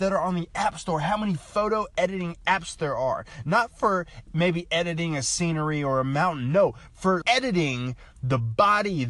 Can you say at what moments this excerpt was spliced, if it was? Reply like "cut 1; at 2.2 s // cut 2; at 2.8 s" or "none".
cut 1; at 7.2 s